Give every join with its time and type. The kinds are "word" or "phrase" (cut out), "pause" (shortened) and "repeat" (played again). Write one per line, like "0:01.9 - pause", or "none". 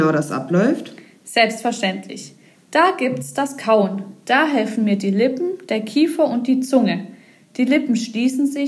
none